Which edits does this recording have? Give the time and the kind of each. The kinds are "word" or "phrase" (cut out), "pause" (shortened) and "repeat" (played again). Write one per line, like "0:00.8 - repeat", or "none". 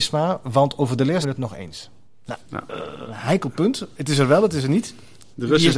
0:01.2 - word